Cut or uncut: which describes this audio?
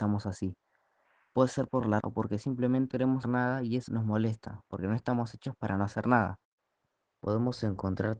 cut